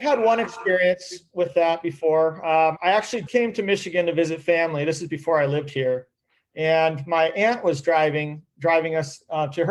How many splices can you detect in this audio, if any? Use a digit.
2